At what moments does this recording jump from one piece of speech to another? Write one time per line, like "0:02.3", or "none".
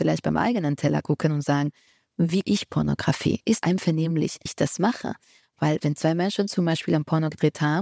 0:02.4
0:03.6
0:04.5